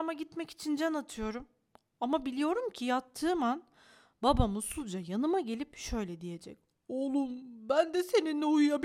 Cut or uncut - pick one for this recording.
uncut